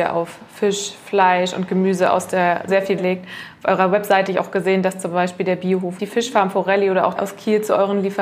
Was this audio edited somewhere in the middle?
yes; 5 cuts; at 2.7 s, 3.0 s, 4.3 s, 6.0 s, 7.2 s

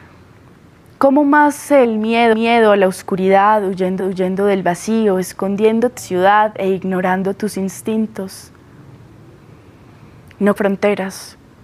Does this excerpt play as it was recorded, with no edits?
no; 5 cuts; at 1.8 s, 2.3 s, 4.0 s, 6.0 s, 10.6 s

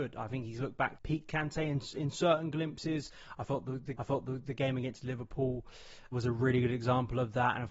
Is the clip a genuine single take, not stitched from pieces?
no; 3 cuts; at 1.0 s, 4.0 s, 6.1 s

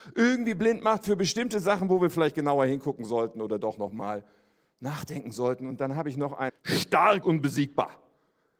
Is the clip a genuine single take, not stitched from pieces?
no; 2 cuts; at 6.5 s, 7.2 s

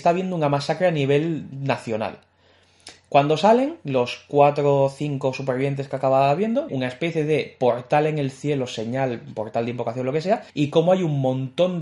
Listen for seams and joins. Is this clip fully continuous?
no; 2 cuts; at 6.7 s, 10.5 s

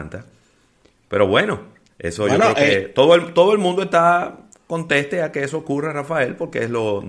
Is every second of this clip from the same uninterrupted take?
yes; 0 cuts

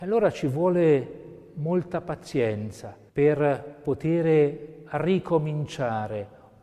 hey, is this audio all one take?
no; 1 cut; at 3.1 s

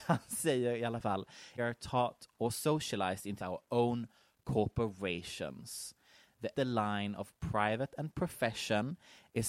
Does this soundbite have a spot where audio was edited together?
yes; 4 cuts; at 1.6 s, 2.3 s, 3.4 s, 6.5 s

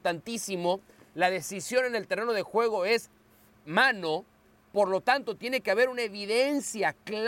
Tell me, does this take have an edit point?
no; 0 cuts

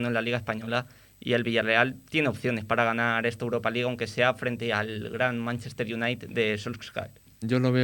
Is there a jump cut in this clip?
no; 0 cuts

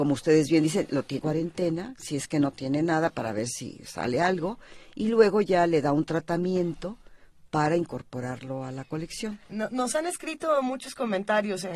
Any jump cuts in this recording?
yes; 2 cuts; at 1.2 s, 9.4 s

